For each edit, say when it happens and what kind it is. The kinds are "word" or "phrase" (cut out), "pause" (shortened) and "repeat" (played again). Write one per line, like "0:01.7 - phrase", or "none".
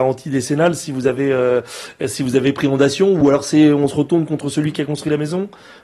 none